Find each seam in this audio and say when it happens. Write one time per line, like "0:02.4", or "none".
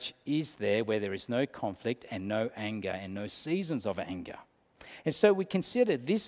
none